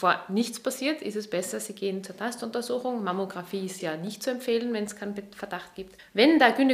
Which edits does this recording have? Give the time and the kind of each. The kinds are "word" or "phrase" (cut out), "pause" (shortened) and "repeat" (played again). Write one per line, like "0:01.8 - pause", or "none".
0:03.8 - word